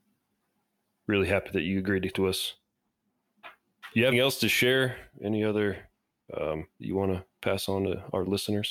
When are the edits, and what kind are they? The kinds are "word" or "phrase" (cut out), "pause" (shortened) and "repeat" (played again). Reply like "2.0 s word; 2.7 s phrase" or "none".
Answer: 2.1 s word; 4.1 s word; 5.1 s pause; 6.8 s phrase